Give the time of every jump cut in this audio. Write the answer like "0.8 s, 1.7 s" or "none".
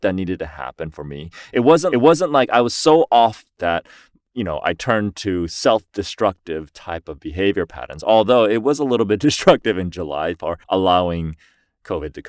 1.9 s, 3.6 s, 10.6 s